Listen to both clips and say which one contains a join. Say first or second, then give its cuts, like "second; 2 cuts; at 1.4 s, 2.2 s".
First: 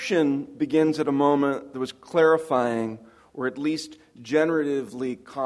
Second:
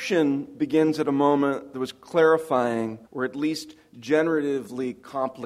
second; 1 cut; at 3.1 s